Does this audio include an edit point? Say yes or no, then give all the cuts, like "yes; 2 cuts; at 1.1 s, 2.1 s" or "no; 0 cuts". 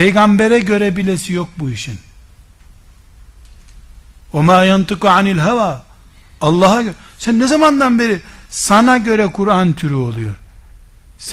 no; 0 cuts